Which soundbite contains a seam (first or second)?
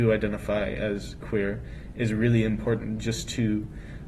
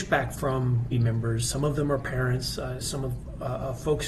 second